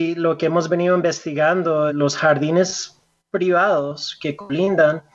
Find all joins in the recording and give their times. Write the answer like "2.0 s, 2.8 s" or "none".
1.9 s